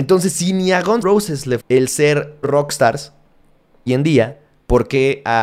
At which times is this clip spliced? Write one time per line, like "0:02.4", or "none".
0:01.0
0:01.6
0:02.4
0:03.9